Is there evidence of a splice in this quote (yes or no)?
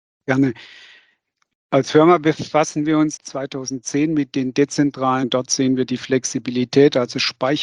yes